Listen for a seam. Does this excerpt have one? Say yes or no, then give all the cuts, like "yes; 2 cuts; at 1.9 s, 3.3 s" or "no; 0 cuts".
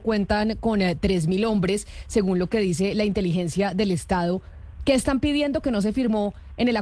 no; 0 cuts